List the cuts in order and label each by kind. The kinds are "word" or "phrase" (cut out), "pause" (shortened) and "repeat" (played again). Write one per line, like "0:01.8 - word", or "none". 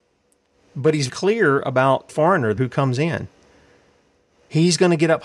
0:01.1 - word
0:02.1 - word
0:02.6 - word